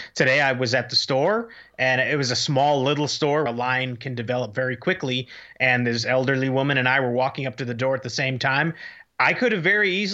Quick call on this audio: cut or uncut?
cut